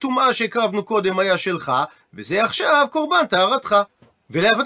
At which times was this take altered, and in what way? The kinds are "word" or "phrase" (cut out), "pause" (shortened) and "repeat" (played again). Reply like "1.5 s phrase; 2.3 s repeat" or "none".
none